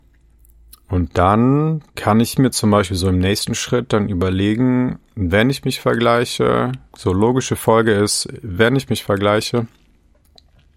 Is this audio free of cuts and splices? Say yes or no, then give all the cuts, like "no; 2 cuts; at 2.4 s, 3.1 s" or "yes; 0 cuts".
no; 3 cuts; at 1.9 s, 5.1 s, 6.9 s